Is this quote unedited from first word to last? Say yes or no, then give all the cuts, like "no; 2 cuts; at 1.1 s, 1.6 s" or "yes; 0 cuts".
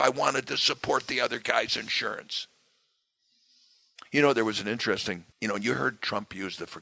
no; 1 cut; at 5.3 s